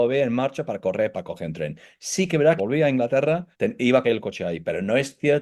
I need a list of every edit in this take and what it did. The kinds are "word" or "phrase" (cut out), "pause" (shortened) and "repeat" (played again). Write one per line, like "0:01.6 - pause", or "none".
0:01.1 - word
0:02.6 - phrase
0:03.5 - pause
0:04.0 - phrase